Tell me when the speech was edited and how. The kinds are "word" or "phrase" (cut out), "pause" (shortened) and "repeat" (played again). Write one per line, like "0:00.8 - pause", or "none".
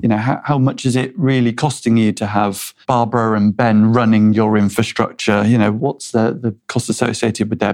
0:02.8 - pause
0:06.6 - pause